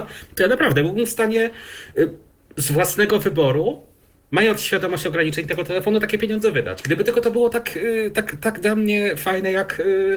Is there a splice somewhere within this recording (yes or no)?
no